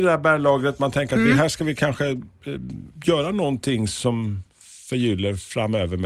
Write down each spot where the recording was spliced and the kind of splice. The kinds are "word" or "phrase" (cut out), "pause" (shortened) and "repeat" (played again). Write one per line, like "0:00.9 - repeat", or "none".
0:02.9 - pause
0:04.5 - pause